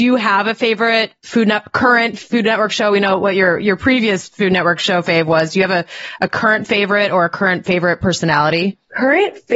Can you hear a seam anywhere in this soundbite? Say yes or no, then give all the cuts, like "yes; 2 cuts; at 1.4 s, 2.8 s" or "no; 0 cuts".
yes; 1 cut; at 1.2 s